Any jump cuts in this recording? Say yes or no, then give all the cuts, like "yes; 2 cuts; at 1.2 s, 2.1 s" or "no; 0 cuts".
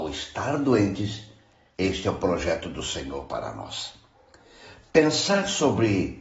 no; 0 cuts